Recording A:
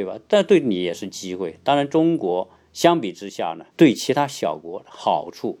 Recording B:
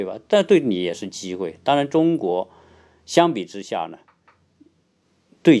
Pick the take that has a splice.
A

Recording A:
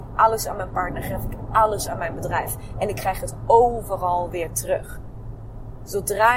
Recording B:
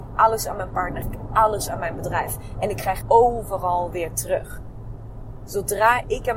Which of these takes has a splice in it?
B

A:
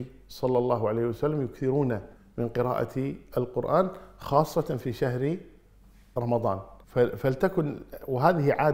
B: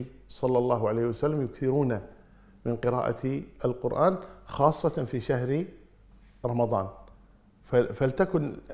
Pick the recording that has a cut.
A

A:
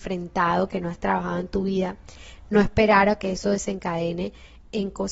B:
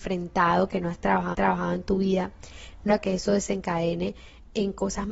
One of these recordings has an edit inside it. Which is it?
B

